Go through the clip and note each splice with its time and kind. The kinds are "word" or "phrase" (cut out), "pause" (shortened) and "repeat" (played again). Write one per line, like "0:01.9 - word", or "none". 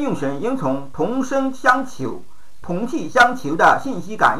0:02.6 - phrase